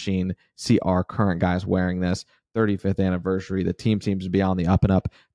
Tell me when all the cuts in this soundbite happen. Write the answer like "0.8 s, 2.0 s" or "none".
none